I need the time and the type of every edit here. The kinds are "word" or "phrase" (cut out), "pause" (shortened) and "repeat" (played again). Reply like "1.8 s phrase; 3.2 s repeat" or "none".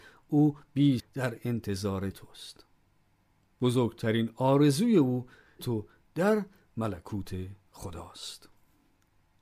1.0 s word; 2.1 s word; 5.6 s phrase